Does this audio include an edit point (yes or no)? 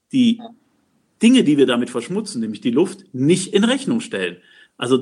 no